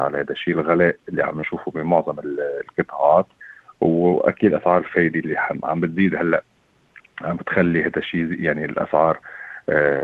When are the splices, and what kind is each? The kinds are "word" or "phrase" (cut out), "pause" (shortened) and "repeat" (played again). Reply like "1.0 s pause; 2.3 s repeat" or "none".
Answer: none